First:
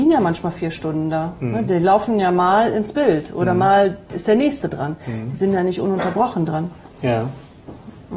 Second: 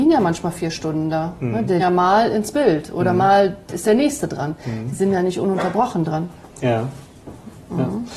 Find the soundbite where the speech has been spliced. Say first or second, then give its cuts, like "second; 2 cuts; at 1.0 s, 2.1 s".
second; 1 cut; at 1.8 s